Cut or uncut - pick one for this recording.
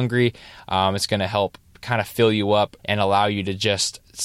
cut